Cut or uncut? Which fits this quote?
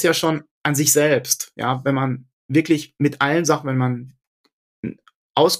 uncut